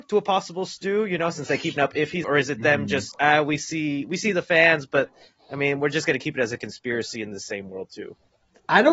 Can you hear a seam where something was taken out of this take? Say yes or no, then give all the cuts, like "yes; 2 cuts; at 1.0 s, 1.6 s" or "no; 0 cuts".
yes; 3 cuts; at 1.8 s, 2.2 s, 3.1 s